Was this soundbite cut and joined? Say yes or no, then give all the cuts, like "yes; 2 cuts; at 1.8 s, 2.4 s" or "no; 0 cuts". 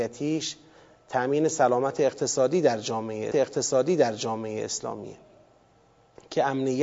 yes; 1 cut; at 3.3 s